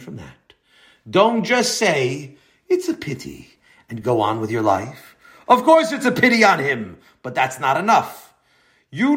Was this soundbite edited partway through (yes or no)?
no